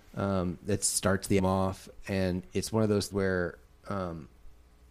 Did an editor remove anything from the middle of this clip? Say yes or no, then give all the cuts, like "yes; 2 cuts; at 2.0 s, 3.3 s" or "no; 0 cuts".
yes; 3 cuts; at 1.4 s, 3.1 s, 3.7 s